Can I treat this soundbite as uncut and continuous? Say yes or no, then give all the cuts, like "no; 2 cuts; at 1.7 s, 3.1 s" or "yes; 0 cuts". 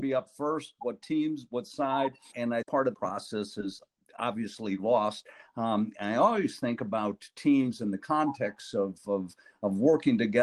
no; 3 cuts; at 2.3 s, 2.6 s, 2.9 s